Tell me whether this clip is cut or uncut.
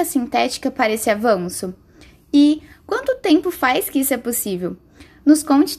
uncut